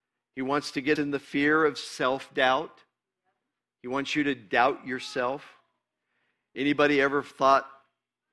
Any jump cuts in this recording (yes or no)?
yes